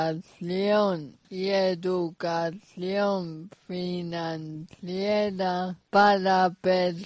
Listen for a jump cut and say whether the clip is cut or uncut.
cut